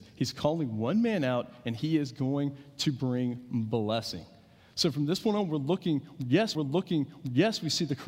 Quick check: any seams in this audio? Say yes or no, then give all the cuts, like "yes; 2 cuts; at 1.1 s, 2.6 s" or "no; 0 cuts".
yes; 1 cut; at 6.5 s